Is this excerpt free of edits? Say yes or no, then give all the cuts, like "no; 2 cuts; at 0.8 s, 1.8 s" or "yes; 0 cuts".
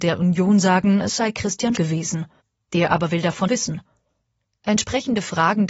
no; 3 cuts; at 1.7 s, 2.4 s, 3.5 s